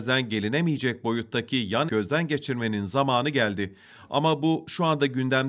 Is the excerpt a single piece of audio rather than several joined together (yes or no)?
no